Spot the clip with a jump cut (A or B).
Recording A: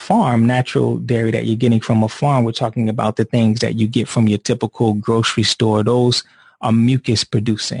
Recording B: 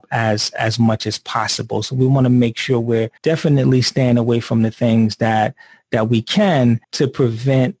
B